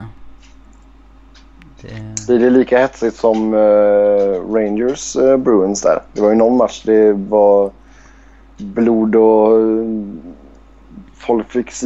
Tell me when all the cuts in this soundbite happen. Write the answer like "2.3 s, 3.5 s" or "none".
none